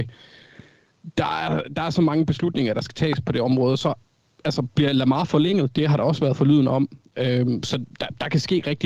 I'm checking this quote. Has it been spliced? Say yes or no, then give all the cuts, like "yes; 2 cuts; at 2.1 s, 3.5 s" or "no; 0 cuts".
no; 0 cuts